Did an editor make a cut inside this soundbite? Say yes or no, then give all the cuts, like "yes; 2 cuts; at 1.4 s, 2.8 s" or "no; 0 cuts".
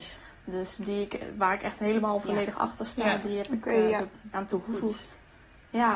yes; 1 cut; at 4.3 s